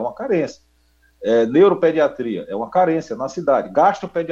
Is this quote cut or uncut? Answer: uncut